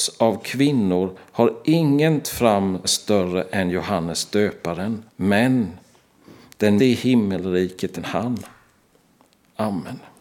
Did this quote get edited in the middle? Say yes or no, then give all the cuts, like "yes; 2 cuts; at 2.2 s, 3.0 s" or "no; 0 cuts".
yes; 5 cuts; at 2.2 s, 2.8 s, 5.1 s, 6.8 s, 8.0 s